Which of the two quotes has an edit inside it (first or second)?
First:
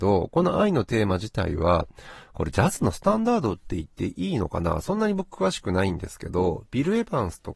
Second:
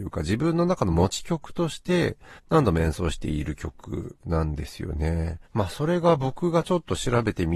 second